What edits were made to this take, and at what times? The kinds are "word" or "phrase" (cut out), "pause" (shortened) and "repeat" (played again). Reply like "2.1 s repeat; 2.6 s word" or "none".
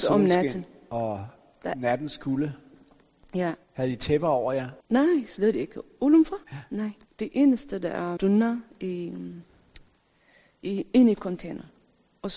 3.6 s pause; 4.8 s pause; 6.4 s pause; 7.0 s pause; 8.2 s word